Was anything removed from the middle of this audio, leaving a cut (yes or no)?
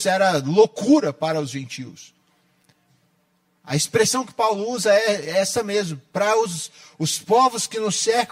no